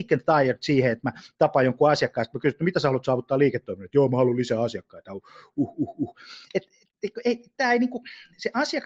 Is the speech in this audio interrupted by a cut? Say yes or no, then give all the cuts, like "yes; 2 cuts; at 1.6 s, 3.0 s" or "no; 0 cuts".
no; 0 cuts